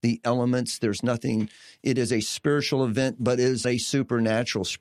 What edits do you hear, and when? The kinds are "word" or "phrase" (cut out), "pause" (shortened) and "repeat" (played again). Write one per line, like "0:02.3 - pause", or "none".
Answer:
0:03.6 - word

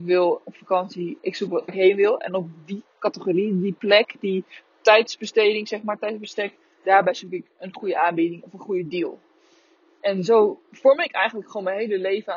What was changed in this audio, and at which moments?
0:01.7 - word

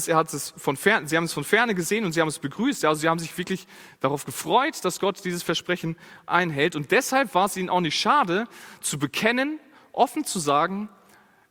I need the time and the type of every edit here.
none

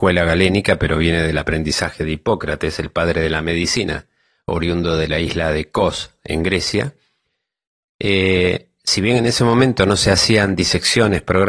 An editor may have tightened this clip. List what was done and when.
none

